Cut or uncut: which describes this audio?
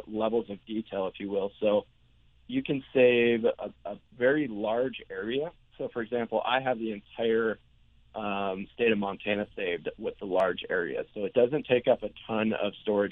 cut